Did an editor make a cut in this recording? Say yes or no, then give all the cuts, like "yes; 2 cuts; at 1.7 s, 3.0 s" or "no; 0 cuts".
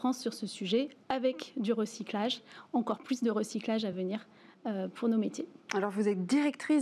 no; 0 cuts